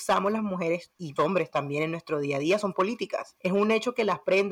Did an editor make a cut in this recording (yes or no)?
yes